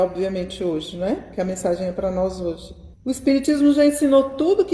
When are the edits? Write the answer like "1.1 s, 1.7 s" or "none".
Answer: 2.9 s